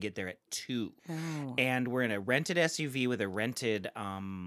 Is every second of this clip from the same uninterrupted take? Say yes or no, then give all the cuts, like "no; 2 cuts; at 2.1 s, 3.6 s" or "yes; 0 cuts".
no; 1 cut; at 1.0 s